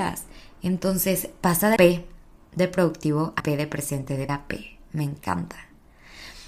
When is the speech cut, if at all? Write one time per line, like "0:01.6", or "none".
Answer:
0:01.8
0:03.4
0:04.3